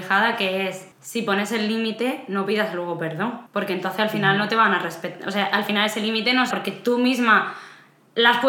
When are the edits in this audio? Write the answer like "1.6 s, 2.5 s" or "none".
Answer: 0.9 s, 3.5 s, 6.5 s